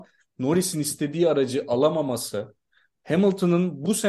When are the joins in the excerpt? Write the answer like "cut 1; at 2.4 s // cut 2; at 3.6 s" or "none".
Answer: none

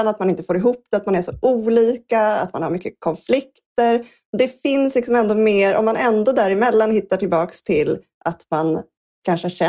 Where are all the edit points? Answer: none

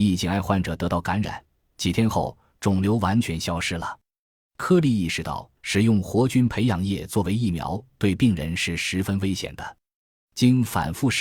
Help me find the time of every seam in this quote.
cut 1; at 5.6 s

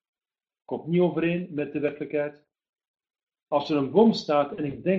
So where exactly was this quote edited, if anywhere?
none

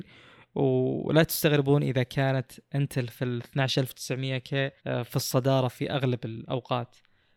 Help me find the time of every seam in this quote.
cut 1; at 4.8 s

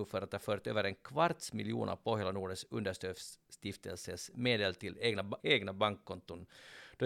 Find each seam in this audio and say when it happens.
cut 1; at 5.4 s

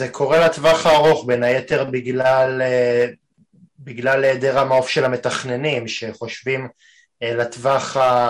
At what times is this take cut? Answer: none

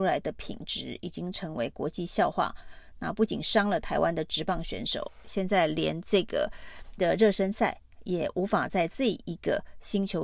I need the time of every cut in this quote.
cut 1; at 7.0 s

